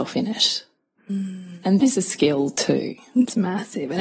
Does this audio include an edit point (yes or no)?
yes